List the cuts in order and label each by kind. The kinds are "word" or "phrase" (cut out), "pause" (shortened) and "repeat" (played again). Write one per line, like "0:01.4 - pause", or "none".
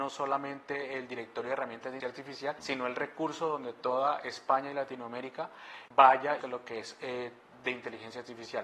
0:02.0 - word
0:02.6 - word
0:05.9 - word
0:06.4 - word